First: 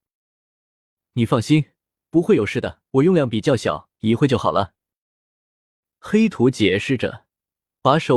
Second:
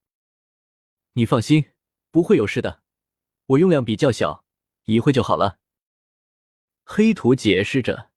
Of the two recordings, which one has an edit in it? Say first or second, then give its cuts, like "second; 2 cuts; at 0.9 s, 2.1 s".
first; 2 cuts; at 2.9 s, 3.9 s